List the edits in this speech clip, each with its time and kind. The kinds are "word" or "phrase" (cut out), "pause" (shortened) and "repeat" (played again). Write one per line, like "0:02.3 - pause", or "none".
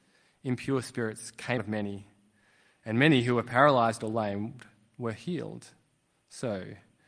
0:01.6 - word